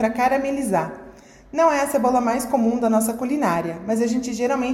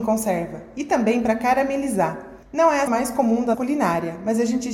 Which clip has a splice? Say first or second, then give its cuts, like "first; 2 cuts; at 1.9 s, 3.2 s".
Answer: second; 3 cuts; at 2.4 s, 2.9 s, 3.5 s